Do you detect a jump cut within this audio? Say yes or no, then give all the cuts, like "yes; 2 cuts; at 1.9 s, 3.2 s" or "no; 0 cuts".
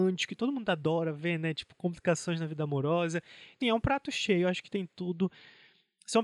yes; 1 cut; at 3.6 s